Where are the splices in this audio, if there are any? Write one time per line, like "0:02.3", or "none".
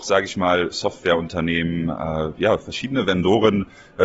none